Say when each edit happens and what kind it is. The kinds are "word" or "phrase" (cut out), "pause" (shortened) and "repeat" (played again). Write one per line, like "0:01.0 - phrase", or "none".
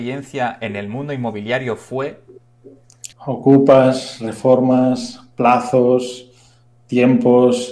0:03.1 - pause